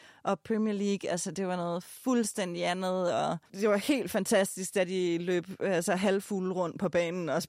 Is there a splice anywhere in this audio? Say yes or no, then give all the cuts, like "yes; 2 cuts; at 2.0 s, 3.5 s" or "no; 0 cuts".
yes; 1 cut; at 3.5 s